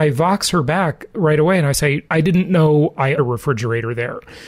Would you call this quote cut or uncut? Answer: cut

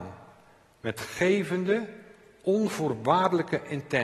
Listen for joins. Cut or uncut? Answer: uncut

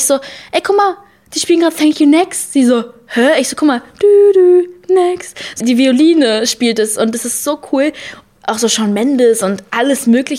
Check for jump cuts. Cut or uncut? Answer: cut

